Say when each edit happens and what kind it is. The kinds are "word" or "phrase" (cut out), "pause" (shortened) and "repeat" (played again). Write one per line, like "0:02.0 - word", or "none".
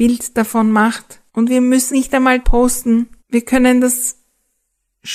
0:01.3 - pause
0:01.9 - word
0:02.4 - word
0:03.2 - pause